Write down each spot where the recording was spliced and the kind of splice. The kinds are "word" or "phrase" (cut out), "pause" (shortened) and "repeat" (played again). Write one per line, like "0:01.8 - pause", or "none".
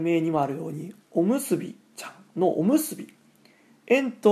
0:01.9 - pause